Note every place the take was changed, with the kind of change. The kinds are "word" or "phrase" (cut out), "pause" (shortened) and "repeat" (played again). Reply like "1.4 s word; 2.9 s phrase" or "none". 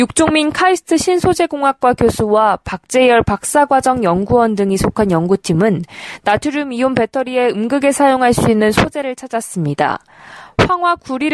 none